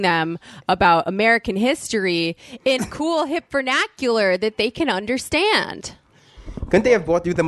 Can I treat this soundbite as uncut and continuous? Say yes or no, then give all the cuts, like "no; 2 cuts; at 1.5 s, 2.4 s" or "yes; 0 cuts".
no; 1 cut; at 2.8 s